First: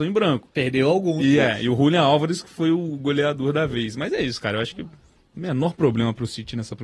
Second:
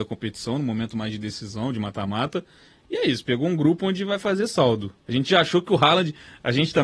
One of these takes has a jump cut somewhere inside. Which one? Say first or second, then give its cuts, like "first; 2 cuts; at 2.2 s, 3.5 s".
second; 1 cut; at 5.0 s